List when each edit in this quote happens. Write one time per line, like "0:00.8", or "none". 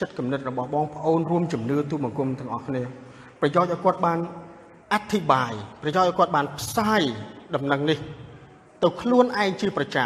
0:04.8
0:08.7